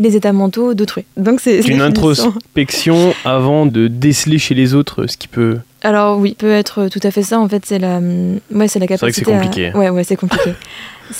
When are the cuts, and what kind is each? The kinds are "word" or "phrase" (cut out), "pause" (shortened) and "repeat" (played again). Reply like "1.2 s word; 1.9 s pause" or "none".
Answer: 1.1 s pause; 1.6 s word; 3.7 s word; 5.7 s pause; 6.4 s word